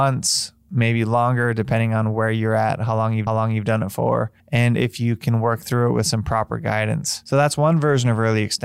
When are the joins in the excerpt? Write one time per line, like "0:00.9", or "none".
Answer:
0:03.3
0:04.4